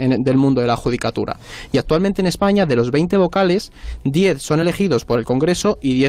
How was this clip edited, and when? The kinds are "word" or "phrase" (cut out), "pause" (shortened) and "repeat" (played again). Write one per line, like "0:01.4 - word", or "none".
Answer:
none